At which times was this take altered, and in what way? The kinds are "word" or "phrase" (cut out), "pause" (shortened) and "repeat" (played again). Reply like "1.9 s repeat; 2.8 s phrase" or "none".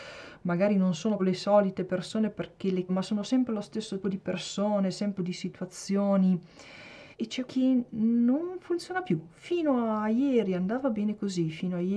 1.2 s word; 2.9 s word; 4.0 s word; 5.2 s phrase; 7.1 s pause; 7.5 s word